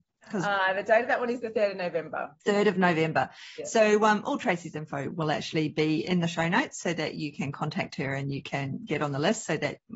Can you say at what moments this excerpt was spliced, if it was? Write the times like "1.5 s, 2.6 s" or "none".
2.4 s